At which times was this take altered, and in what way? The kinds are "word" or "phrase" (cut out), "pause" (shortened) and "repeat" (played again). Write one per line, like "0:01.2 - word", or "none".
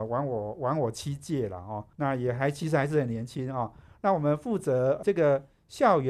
0:01.9 - pause
0:05.0 - word